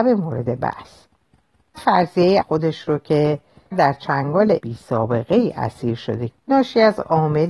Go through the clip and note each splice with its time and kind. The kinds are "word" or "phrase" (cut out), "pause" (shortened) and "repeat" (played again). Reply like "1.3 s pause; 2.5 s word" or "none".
1.7 s word; 2.4 s word; 3.7 s word; 4.6 s word; 6.3 s word